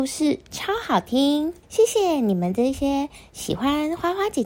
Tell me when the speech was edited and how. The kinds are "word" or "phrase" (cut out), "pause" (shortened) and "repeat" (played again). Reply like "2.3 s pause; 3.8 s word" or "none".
1.6 s pause